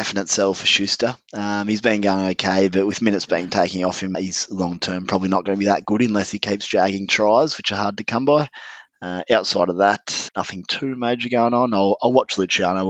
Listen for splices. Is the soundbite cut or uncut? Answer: cut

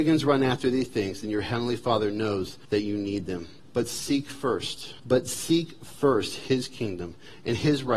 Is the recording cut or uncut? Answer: cut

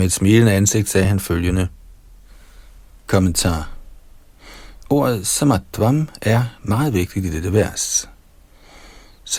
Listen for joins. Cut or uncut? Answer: uncut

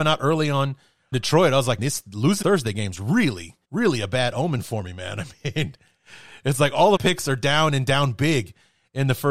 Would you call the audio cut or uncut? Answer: cut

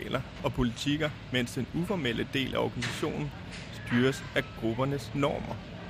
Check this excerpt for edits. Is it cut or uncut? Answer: uncut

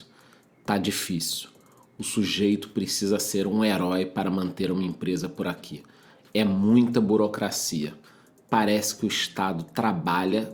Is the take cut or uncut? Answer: uncut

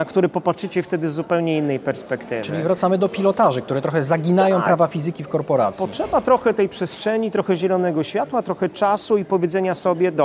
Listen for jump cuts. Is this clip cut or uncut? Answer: uncut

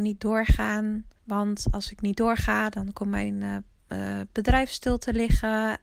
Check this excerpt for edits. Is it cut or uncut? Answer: cut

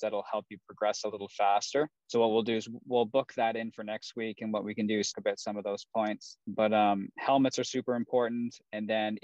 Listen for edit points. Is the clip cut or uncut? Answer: cut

